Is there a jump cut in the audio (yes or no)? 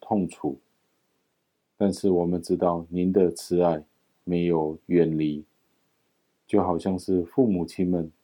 no